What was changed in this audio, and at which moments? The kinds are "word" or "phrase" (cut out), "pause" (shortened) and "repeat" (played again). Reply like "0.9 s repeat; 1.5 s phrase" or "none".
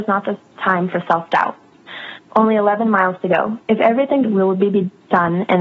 3.6 s pause; 4.2 s phrase